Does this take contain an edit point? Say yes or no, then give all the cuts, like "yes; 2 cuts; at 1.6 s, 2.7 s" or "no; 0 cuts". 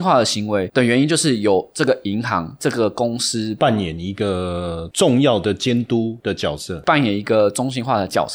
yes; 1 cut; at 6.8 s